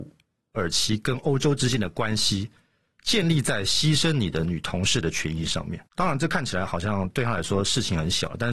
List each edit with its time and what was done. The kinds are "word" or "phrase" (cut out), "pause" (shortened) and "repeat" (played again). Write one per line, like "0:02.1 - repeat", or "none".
0:05.9 - pause